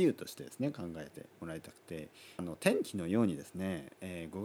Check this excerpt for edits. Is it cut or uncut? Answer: cut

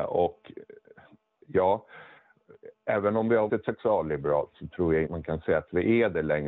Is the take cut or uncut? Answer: cut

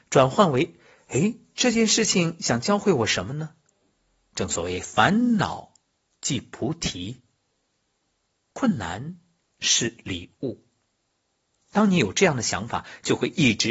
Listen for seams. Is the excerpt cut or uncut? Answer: uncut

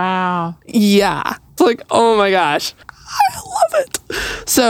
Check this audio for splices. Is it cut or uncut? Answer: cut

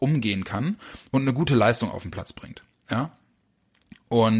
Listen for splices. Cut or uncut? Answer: uncut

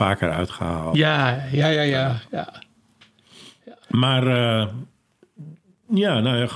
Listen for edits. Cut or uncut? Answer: cut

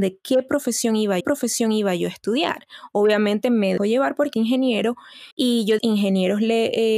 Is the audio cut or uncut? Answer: cut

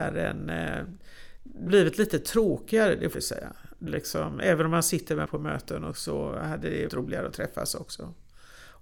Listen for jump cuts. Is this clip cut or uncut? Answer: cut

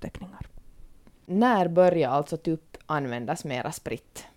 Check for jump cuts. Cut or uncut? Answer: uncut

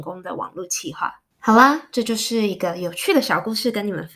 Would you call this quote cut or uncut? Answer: cut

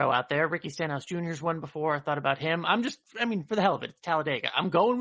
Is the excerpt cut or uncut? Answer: uncut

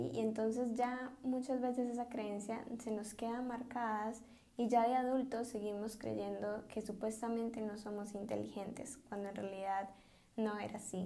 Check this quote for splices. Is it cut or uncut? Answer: uncut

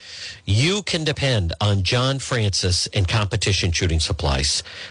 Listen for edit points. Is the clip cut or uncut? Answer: uncut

